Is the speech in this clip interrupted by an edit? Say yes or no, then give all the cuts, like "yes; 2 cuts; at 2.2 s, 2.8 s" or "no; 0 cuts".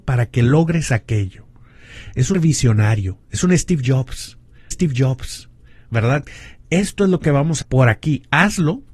yes; 3 cuts; at 2.3 s, 4.7 s, 7.6 s